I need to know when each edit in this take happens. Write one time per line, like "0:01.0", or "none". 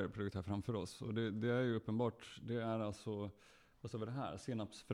none